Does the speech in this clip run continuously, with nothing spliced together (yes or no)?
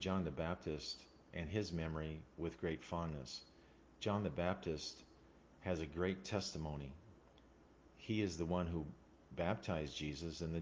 yes